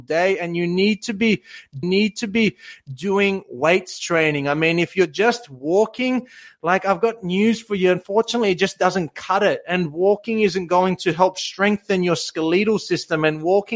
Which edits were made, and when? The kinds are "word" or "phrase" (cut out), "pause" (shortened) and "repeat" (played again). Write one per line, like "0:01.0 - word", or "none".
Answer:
0:01.8 - repeat